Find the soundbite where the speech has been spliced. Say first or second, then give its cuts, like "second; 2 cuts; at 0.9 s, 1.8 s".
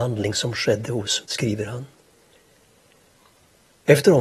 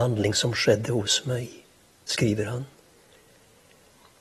first; 1 cut; at 1.2 s